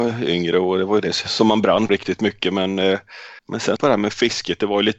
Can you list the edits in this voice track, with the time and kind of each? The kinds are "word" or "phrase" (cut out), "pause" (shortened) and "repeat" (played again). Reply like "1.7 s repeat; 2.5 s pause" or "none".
1.9 s word; 3.4 s pause; 3.8 s phrase